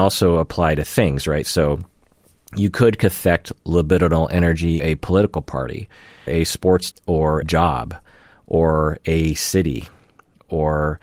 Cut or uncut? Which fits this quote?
cut